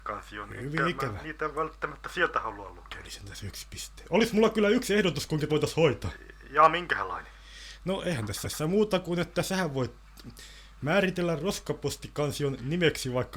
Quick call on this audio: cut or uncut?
cut